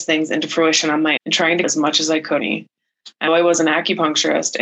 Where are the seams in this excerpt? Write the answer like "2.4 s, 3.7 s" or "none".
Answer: 1.2 s, 1.6 s, 2.4 s, 3.3 s